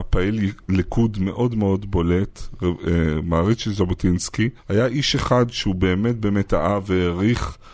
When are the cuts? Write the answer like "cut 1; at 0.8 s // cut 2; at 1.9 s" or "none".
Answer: cut 1; at 4.6 s